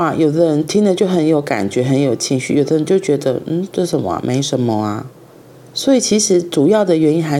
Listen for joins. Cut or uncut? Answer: cut